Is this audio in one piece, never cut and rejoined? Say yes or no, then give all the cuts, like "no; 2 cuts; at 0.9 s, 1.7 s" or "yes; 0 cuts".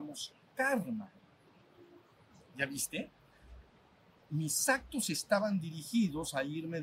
yes; 0 cuts